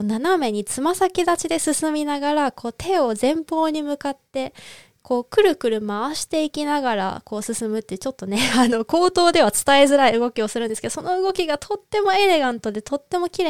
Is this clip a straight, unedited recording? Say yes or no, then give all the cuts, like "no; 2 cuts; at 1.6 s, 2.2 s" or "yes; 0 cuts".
yes; 0 cuts